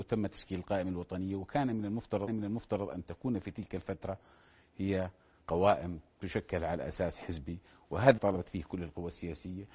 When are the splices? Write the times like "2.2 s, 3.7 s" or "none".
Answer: 2.3 s, 8.2 s